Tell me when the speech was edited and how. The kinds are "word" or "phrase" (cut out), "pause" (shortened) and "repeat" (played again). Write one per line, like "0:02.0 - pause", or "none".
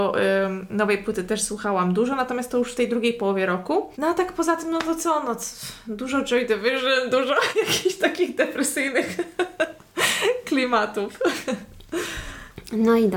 0:03.9 - pause